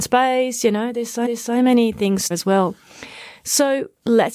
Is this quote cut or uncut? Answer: cut